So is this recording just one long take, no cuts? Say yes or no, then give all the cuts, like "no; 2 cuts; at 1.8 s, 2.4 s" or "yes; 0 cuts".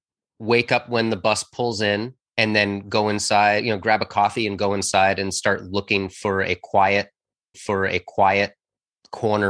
no; 2 cuts; at 2.3 s, 7.5 s